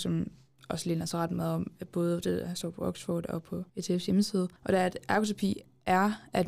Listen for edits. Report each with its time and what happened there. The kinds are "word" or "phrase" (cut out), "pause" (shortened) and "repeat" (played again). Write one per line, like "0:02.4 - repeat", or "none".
0:03.7 - pause
0:04.6 - pause